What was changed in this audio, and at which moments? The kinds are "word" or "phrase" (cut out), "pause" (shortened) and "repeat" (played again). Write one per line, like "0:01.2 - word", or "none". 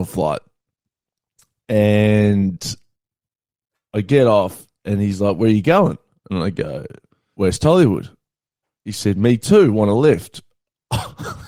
0:07.3 - word